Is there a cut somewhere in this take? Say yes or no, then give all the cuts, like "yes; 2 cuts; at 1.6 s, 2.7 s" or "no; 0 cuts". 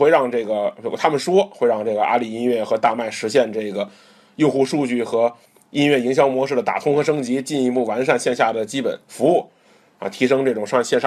no; 0 cuts